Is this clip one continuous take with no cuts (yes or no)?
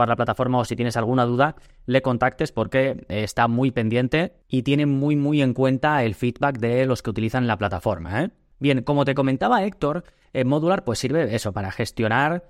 yes